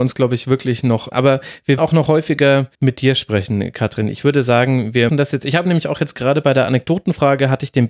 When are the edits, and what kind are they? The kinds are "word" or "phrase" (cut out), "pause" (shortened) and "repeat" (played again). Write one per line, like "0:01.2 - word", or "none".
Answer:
0:01.1 - word
0:01.8 - word
0:02.7 - pause
0:05.1 - word